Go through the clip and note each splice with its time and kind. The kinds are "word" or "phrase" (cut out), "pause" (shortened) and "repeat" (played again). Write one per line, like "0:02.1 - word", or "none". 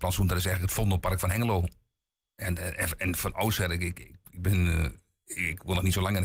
none